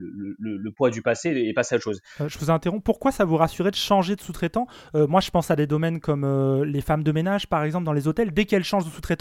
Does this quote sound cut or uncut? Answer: uncut